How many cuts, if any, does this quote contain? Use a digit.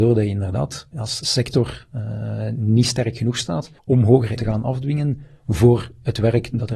3